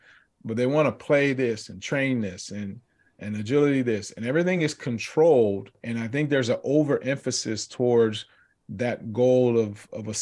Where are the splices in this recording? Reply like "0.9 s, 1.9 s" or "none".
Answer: none